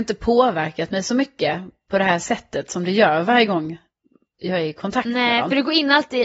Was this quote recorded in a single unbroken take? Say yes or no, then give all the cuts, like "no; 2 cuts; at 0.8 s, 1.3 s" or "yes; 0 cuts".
yes; 0 cuts